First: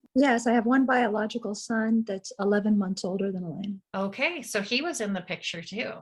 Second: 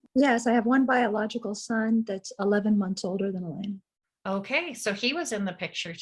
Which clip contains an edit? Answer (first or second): first